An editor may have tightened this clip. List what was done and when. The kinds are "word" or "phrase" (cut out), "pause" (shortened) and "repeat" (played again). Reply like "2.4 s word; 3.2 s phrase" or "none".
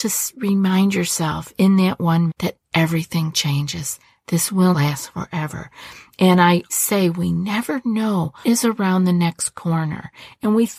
2.3 s word; 4.7 s word; 6.7 s word; 8.4 s word